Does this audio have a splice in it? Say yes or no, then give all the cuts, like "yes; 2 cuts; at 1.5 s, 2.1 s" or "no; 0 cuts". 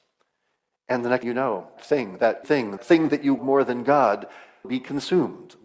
yes; 6 cuts; at 1.2 s, 1.8 s, 2.4 s, 2.8 s, 3.4 s, 4.6 s